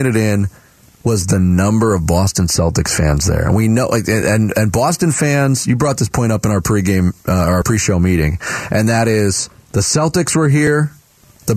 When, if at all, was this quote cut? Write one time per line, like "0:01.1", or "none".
0:09.5